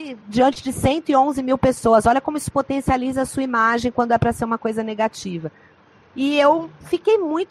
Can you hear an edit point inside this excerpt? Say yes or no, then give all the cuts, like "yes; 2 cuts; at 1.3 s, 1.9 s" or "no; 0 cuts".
no; 0 cuts